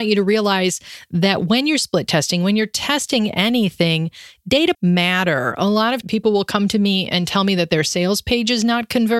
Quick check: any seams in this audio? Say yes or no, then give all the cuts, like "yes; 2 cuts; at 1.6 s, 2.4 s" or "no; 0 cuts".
yes; 2 cuts; at 4.7 s, 6.0 s